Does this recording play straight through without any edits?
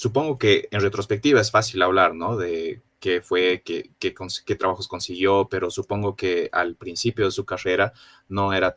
yes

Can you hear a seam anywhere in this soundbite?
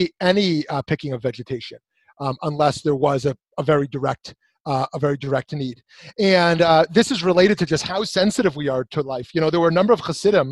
no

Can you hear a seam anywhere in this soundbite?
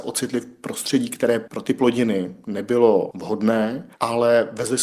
yes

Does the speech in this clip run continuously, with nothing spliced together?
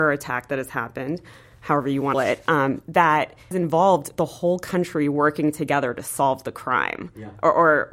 no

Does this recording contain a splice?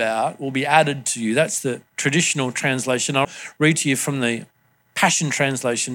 yes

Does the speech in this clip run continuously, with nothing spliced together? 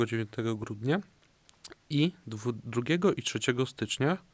yes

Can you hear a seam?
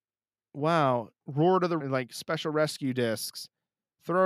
yes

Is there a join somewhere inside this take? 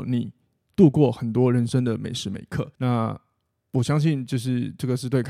yes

